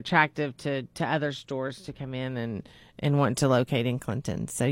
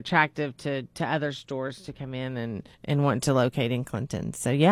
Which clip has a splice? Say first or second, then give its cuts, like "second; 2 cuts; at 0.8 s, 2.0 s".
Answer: second; 1 cut; at 2.7 s